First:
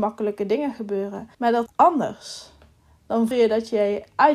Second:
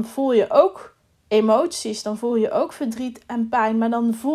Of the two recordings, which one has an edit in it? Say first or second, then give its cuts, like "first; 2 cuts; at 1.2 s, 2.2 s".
first; 3 cuts; at 1.3 s, 1.7 s, 3.3 s